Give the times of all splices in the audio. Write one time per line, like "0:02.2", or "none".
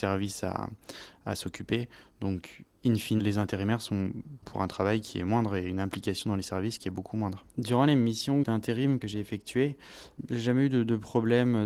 0:03.2
0:04.4
0:07.5